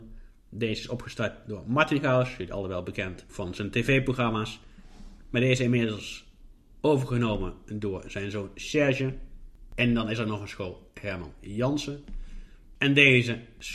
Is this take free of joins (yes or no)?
yes